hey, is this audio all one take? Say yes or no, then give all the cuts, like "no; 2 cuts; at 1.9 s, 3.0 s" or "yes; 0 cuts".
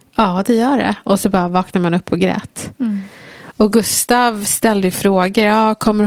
yes; 0 cuts